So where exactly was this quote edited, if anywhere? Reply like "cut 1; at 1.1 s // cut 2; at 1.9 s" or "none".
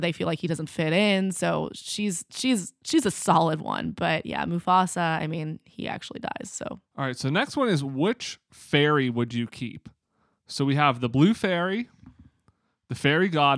cut 1; at 6.9 s